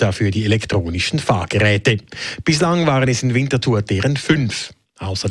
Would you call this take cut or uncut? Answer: uncut